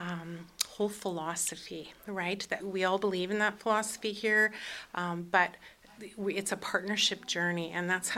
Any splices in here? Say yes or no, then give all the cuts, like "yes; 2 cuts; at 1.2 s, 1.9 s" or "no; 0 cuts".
yes; 1 cut; at 2.6 s